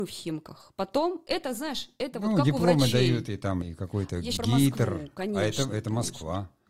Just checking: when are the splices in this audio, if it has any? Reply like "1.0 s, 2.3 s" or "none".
3.6 s, 4.4 s

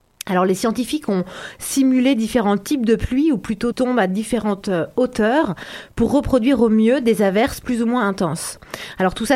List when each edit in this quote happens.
3.7 s

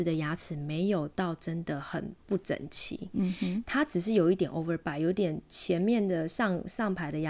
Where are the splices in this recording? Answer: 2.2 s

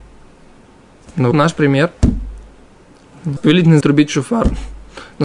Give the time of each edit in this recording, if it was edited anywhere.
1.3 s, 3.4 s, 3.8 s

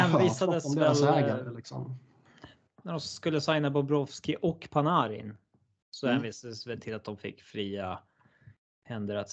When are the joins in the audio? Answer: none

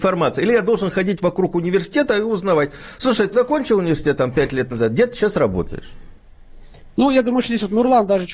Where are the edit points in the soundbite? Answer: 3.3 s

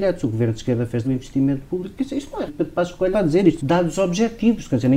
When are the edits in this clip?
1.0 s, 2.5 s, 3.1 s, 3.6 s

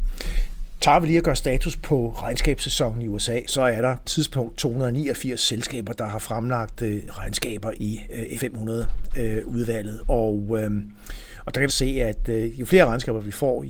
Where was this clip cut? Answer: 3.5 s, 4.0 s, 7.8 s, 8.4 s, 11.7 s

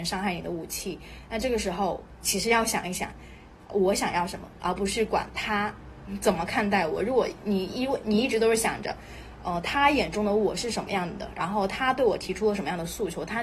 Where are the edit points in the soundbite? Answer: none

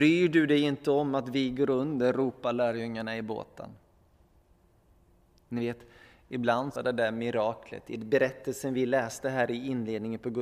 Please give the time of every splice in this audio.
6.8 s

